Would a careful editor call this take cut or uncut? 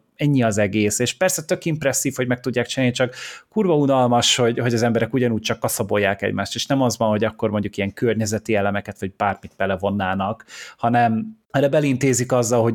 cut